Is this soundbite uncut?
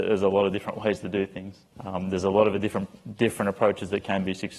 no; 1 cut; at 1.7 s

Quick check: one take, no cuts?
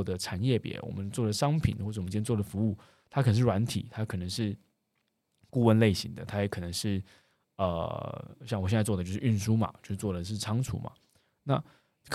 yes; 0 cuts

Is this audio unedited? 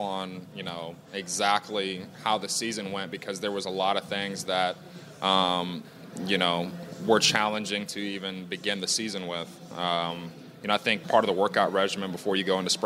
no; 2 cuts; at 1.0 s, 11.0 s

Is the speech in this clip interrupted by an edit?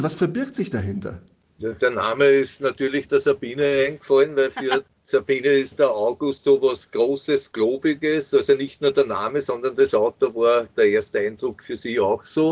no; 0 cuts

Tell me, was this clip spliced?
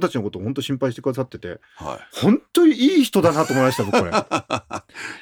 yes; 1 cut; at 2.1 s

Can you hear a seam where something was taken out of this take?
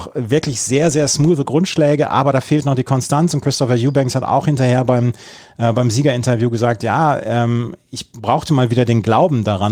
no; 0 cuts

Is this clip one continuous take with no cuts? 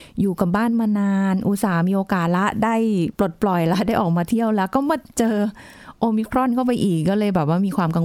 no; 1 cut; at 3.1 s

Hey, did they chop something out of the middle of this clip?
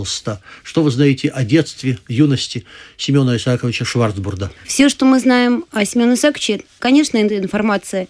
yes; 1 cut; at 4.6 s

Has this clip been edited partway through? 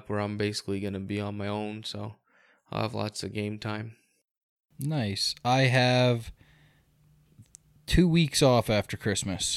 no; 0 cuts

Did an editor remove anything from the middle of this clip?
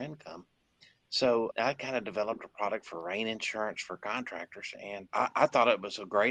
no; 0 cuts

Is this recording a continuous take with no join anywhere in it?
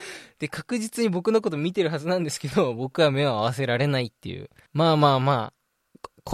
no; 1 cut; at 4.7 s

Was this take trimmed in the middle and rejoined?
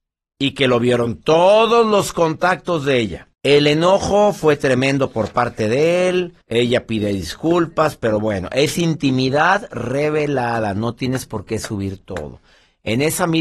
yes; 2 cuts; at 3.3 s, 6.4 s

